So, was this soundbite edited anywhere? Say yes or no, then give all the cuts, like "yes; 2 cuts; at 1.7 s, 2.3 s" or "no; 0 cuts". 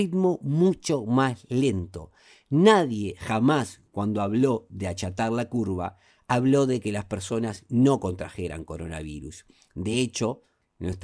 no; 0 cuts